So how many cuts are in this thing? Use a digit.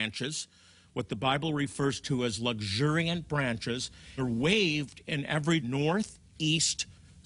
2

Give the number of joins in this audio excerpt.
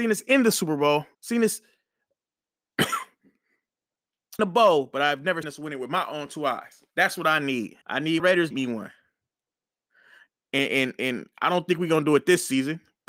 7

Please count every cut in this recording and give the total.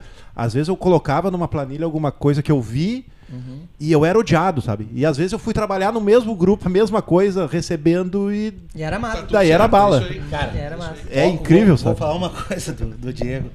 3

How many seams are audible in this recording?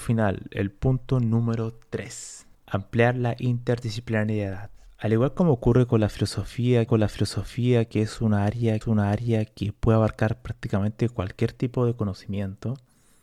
2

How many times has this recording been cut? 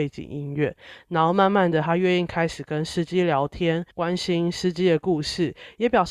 1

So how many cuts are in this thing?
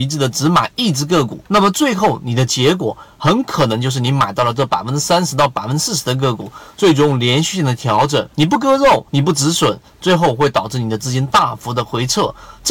3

